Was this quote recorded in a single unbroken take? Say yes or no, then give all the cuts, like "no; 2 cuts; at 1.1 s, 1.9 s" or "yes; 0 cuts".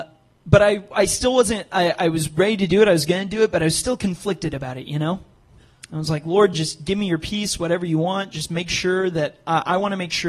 yes; 0 cuts